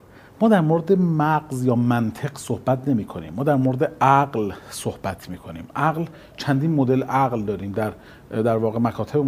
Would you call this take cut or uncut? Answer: uncut